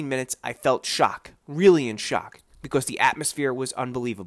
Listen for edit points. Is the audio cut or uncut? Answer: uncut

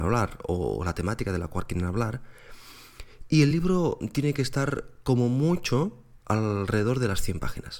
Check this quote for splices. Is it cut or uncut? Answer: uncut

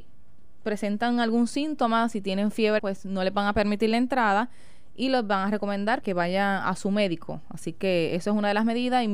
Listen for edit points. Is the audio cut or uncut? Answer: cut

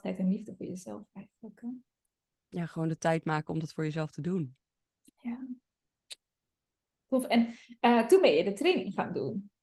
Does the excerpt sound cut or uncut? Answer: uncut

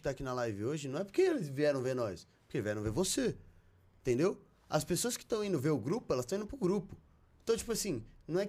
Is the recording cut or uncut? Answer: uncut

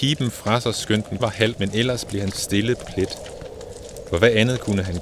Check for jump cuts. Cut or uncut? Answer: cut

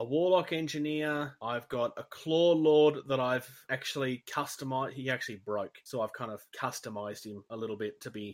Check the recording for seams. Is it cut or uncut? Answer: uncut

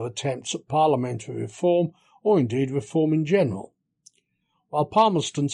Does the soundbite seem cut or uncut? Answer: uncut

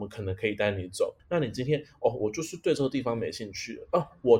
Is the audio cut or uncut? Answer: cut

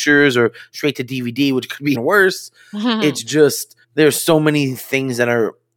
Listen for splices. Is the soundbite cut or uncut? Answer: cut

